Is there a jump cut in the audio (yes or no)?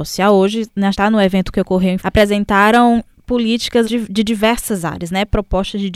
yes